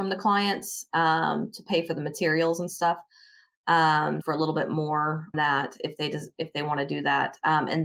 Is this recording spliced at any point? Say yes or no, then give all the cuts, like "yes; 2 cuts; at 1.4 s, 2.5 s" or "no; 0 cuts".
yes; 2 cuts; at 4.2 s, 5.3 s